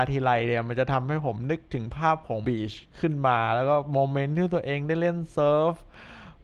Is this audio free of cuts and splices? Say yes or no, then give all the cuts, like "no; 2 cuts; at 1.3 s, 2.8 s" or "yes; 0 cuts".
no; 2 cuts; at 2.4 s, 2.9 s